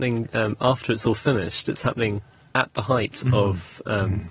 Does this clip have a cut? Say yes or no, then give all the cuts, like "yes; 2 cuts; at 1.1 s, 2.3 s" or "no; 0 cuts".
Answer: no; 0 cuts